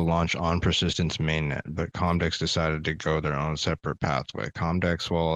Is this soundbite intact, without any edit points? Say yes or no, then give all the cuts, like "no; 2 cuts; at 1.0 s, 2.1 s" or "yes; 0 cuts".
yes; 0 cuts